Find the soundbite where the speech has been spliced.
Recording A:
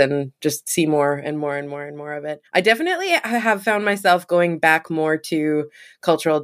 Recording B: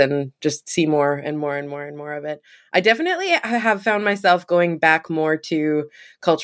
A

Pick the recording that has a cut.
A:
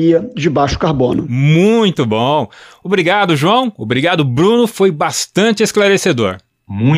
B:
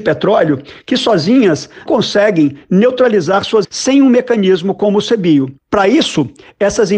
B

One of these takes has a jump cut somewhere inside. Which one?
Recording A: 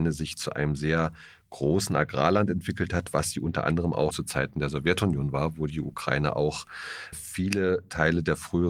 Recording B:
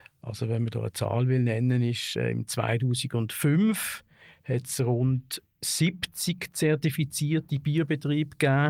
A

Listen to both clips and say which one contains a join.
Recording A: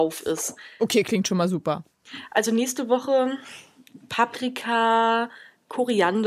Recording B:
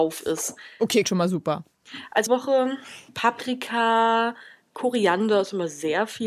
B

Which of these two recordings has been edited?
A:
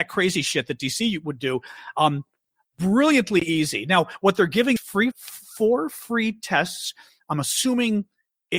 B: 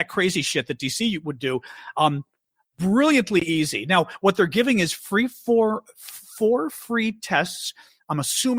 A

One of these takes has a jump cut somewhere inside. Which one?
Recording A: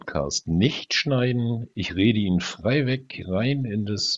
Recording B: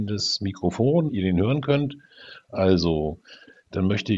B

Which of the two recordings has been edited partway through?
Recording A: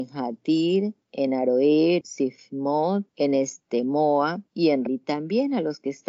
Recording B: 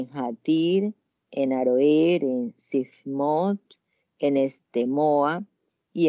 A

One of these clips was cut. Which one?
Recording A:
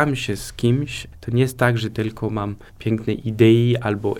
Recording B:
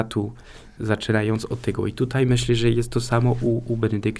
A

